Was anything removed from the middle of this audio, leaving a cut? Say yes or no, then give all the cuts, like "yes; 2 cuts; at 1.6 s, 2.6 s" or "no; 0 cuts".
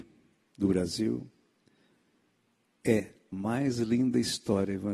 yes; 1 cut; at 3.3 s